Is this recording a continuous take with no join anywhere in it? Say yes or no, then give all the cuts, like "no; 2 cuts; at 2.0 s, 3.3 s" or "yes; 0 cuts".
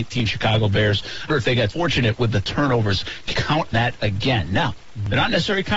no; 4 cuts; at 1.3 s, 1.7 s, 3.3 s, 3.7 s